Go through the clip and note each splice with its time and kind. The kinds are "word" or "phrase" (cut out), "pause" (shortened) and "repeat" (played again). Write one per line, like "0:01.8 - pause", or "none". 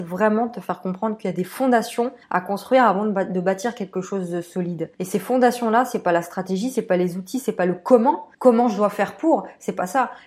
0:02.2 - pause
0:04.9 - pause
0:08.3 - pause